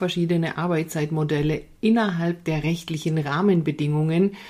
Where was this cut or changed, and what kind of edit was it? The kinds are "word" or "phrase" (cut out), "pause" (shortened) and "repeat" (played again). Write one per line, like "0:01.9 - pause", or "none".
none